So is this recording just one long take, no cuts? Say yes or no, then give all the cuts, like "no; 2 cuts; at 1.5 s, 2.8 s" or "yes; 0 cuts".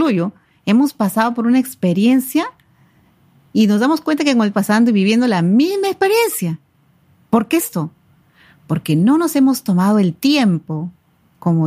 no; 2 cuts; at 4.5 s, 7.6 s